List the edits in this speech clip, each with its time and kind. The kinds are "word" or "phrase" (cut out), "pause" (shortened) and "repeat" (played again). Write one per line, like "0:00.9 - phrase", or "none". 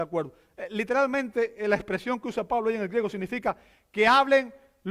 none